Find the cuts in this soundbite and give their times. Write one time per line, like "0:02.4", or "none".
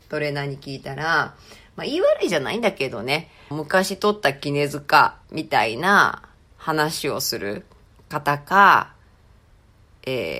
0:03.5
0:05.2
0:07.8